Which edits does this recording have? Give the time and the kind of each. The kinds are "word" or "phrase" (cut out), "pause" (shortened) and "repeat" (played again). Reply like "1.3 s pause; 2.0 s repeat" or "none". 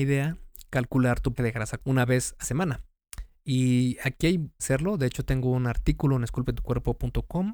1.4 s word; 1.8 s word; 2.4 s word; 4.6 s phrase